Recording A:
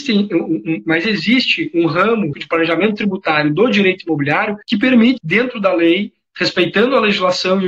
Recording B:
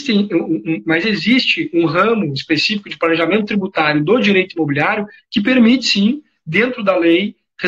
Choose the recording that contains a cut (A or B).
A